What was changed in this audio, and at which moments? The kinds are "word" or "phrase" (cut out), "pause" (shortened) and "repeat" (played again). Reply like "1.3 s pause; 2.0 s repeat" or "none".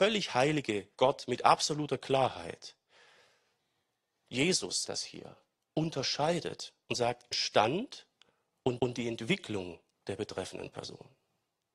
0.9 s pause; 4.8 s word; 6.8 s pause; 7.3 s phrase; 8.8 s repeat

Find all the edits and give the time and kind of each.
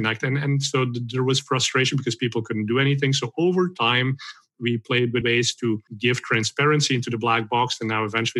5.2 s word; 5.9 s pause

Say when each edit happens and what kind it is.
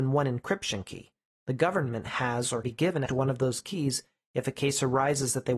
2.6 s word; 3.1 s word

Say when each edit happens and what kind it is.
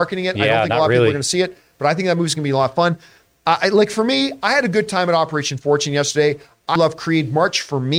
6.8 s word

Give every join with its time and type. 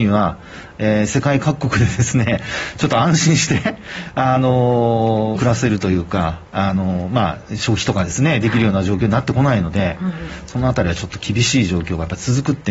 5.4 s phrase; 6.5 s pause

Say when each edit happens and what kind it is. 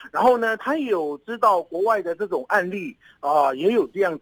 none

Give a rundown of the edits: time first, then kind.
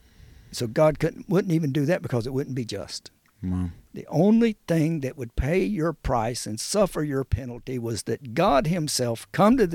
3.2 s pause

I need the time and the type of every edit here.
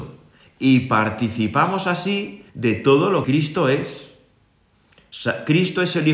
2.5 s pause; 3.2 s word

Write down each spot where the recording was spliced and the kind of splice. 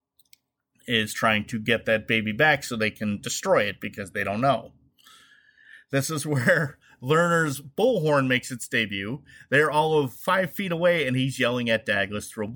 none

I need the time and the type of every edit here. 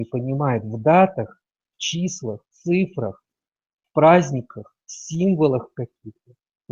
2.5 s pause

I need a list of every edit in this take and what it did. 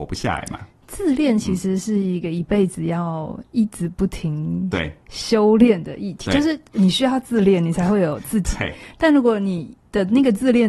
5.0 s pause

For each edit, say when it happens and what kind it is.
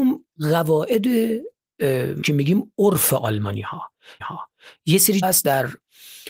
2.2 s word; 4.2 s repeat; 5.2 s word

